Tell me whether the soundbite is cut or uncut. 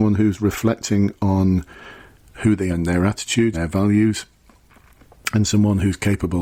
cut